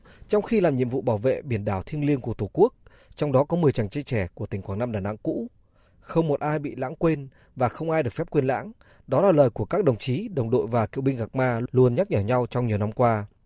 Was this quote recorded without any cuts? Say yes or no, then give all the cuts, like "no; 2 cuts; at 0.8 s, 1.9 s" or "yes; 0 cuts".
yes; 0 cuts